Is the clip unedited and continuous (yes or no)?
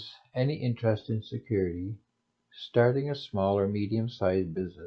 yes